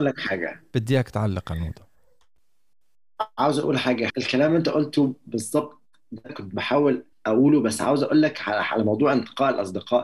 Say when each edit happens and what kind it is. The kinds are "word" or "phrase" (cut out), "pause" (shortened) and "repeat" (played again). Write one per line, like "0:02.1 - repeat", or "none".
0:04.1 - word
0:06.3 - word
0:07.1 - pause